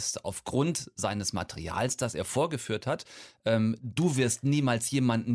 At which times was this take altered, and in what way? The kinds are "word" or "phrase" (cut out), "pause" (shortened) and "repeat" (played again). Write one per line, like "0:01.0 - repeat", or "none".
none